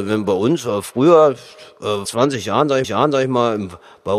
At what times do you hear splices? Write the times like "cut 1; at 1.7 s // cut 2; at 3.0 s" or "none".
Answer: cut 1; at 2.0 s // cut 2; at 2.8 s

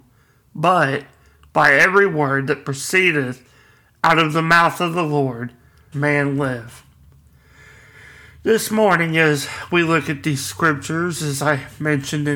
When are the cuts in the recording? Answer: cut 1; at 5.9 s

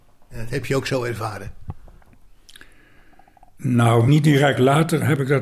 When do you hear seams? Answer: cut 1; at 4.1 s

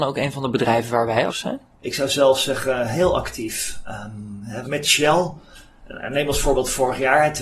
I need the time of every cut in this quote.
cut 1; at 1.3 s // cut 2; at 4.6 s

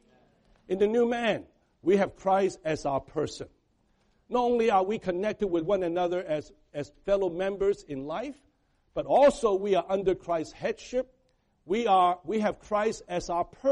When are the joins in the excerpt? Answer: none

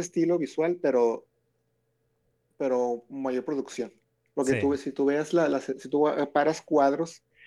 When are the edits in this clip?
none

